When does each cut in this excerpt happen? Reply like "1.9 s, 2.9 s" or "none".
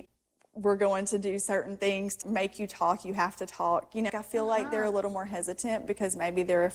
2.2 s, 4.1 s